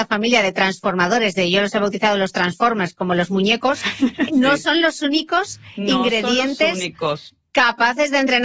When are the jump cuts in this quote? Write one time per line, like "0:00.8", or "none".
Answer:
0:04.3